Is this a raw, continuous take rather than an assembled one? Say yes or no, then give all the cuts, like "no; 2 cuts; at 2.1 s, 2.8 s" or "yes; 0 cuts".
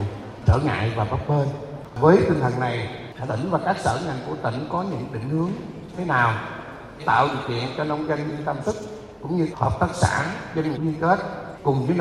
no; 6 cuts; at 3.3 s, 5.9 s, 7.0 s, 8.6 s, 9.5 s, 10.7 s